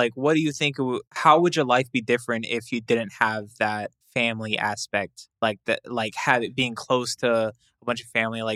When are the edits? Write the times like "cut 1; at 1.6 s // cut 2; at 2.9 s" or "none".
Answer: cut 1; at 1.1 s // cut 2; at 4.0 s // cut 3; at 5.3 s